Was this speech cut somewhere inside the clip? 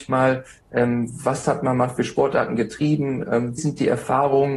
yes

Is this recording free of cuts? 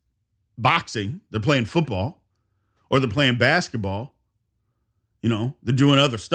yes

